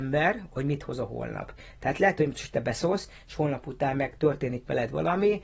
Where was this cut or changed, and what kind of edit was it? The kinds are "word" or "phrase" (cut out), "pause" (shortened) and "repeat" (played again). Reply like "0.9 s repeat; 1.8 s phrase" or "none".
none